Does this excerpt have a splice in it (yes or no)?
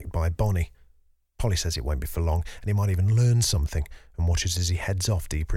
no